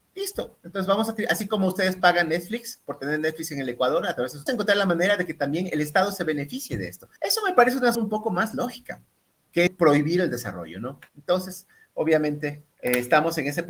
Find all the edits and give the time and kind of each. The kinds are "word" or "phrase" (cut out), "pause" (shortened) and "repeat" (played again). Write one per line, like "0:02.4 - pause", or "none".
0:04.5 - phrase
0:07.2 - pause
0:07.9 - word
0:09.7 - phrase
0:11.1 - pause
0:12.7 - pause